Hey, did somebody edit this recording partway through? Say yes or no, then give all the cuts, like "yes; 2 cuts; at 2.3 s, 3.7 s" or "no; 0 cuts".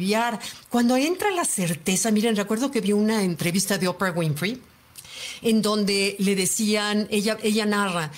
no; 0 cuts